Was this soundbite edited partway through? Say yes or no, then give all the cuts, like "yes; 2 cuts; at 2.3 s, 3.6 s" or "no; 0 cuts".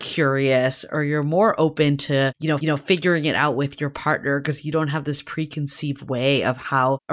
yes; 1 cut; at 2.6 s